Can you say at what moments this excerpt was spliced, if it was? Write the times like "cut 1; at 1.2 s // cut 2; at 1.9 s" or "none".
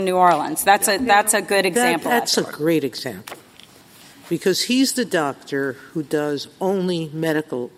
none